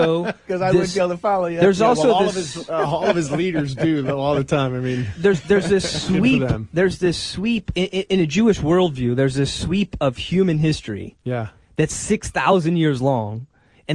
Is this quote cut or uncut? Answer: uncut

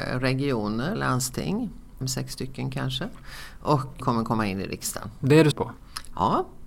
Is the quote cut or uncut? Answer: cut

